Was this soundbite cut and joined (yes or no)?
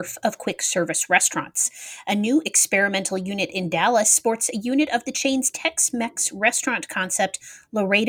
no